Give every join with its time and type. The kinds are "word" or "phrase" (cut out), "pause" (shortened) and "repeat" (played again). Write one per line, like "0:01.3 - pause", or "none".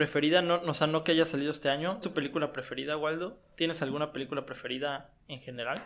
0:02.0 - phrase